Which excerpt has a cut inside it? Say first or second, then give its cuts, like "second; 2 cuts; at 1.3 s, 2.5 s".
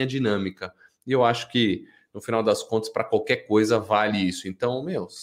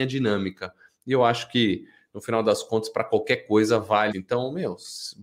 second; 1 cut; at 4.1 s